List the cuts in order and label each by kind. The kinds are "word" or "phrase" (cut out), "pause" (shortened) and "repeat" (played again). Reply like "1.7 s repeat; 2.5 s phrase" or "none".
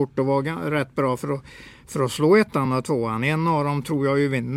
none